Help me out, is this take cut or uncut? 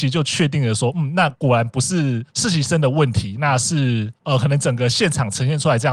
uncut